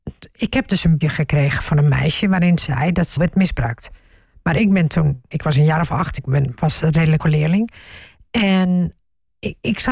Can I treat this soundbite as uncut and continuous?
no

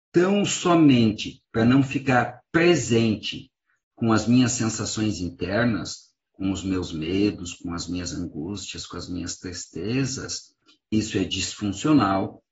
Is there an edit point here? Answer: yes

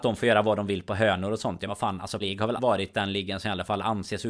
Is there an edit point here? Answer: yes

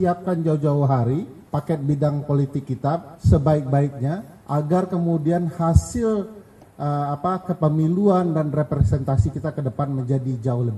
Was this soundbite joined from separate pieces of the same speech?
yes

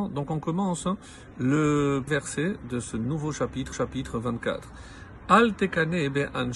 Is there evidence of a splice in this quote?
yes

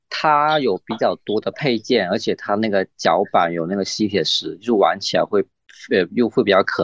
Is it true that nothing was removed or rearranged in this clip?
yes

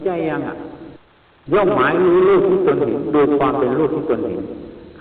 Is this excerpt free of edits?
no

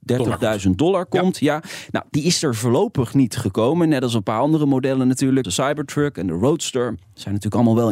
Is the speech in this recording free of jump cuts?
no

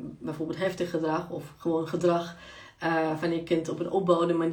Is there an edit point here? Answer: no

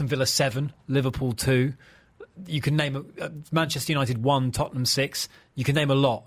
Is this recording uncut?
yes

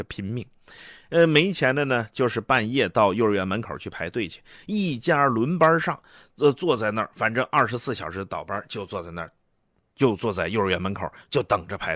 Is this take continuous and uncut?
yes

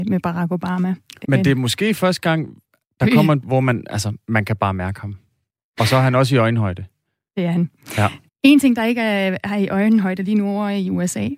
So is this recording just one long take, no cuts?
no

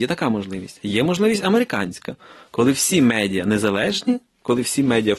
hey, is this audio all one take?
yes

